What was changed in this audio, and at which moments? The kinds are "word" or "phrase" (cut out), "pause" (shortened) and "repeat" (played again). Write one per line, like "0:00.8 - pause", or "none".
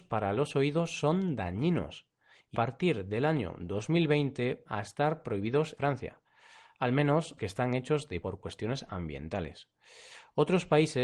0:02.5 - word
0:04.7 - word
0:05.8 - word
0:07.4 - word
0:08.2 - word